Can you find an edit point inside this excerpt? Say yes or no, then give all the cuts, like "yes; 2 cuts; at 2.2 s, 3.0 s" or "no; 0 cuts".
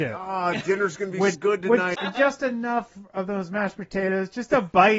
yes; 2 cuts; at 1.3 s, 1.9 s